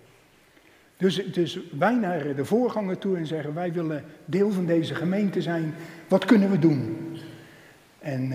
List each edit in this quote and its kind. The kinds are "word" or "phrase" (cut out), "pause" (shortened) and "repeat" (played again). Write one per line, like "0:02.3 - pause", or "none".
none